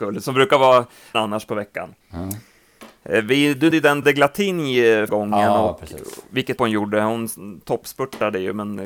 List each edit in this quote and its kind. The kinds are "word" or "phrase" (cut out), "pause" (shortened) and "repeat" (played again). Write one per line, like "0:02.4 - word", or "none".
0:01.1 - word
0:02.0 - pause
0:03.7 - word
0:04.0 - word
0:05.1 - word
0:06.6 - word